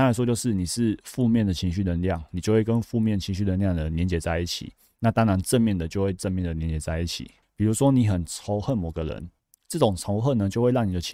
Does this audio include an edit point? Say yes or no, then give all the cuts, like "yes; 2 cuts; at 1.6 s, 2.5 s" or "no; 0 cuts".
yes; 2 cuts; at 7.4 s, 9.4 s